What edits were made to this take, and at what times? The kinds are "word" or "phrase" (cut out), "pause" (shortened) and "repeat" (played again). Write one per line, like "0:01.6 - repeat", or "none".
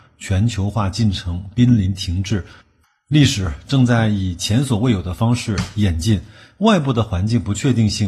none